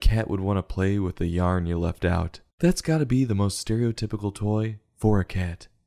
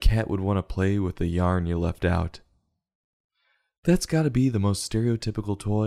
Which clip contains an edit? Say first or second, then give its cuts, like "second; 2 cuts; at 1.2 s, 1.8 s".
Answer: first; 1 cut; at 2.5 s